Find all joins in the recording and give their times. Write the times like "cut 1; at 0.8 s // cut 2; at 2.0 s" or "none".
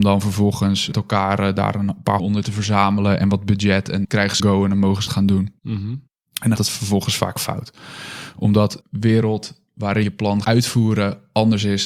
cut 1; at 0.9 s // cut 2; at 2.2 s // cut 3; at 4.0 s // cut 4; at 4.4 s // cut 5; at 5.1 s // cut 6; at 6.6 s // cut 7; at 8.8 s // cut 8; at 10.0 s // cut 9; at 10.4 s